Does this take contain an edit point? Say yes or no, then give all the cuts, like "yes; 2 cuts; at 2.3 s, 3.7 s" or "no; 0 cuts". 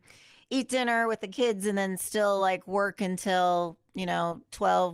no; 0 cuts